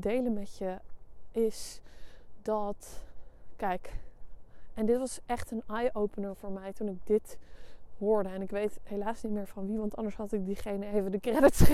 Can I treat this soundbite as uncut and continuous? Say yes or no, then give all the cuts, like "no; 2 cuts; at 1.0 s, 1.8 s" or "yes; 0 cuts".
yes; 0 cuts